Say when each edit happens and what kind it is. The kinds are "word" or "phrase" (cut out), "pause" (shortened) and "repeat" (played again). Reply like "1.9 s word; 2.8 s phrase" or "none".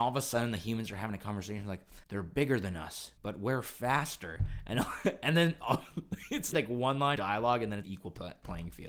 2.0 s pause; 6.5 s word; 7.2 s word; 7.8 s phrase